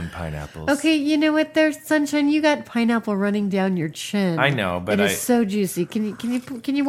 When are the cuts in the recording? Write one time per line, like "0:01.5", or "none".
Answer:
none